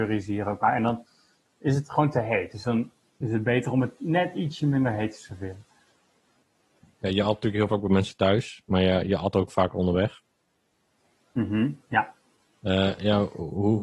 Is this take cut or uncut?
uncut